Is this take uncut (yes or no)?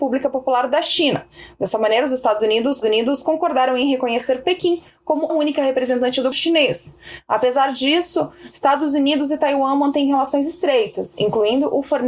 no